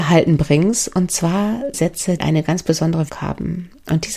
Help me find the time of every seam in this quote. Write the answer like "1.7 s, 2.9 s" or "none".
1.7 s, 2.2 s, 3.1 s